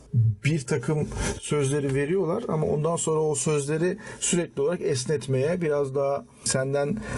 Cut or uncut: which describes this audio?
uncut